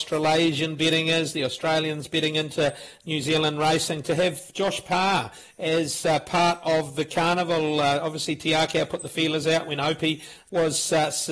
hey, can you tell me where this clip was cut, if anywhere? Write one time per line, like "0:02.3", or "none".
none

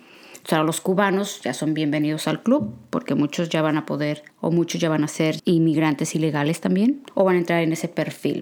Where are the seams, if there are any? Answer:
0:04.3
0:05.4
0:07.1

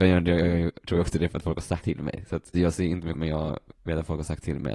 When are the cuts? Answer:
0:01.8
0:02.5
0:03.1
0:03.7

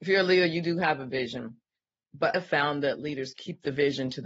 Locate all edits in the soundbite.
0:02.3

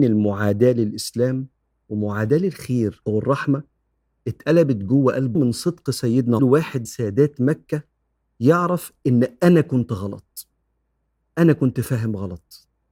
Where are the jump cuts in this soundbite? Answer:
0:03.0
0:05.4
0:06.4
0:06.9

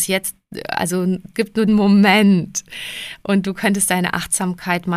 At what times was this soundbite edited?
0:01.3
0:01.7

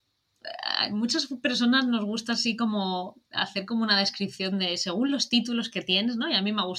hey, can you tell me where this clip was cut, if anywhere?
none

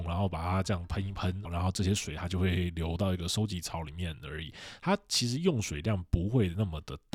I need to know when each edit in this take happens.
0:01.5

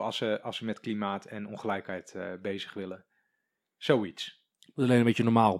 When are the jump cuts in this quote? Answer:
0:04.5

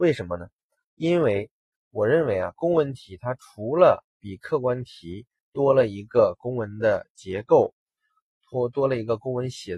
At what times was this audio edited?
0:04.1

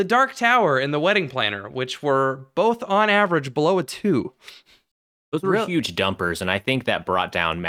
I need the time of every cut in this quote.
none

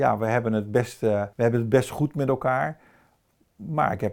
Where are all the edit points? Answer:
0:01.3

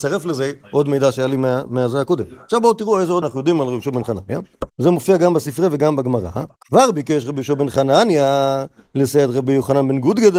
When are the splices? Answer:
0:03.2
0:04.7
0:06.6

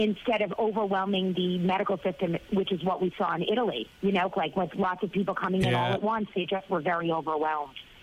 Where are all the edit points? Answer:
0:03.9
0:04.3

